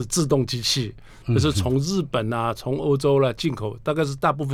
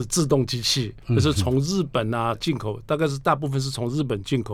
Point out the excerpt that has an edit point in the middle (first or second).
second